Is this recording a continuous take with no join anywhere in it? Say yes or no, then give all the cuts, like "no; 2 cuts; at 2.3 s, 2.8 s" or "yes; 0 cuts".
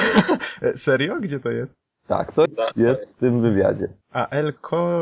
no; 2 cuts; at 2.5 s, 4.0 s